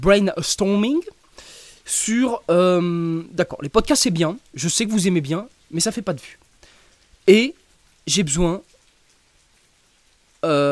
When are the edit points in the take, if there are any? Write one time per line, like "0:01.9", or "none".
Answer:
none